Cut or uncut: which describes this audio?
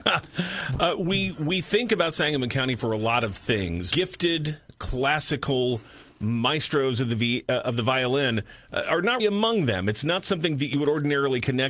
cut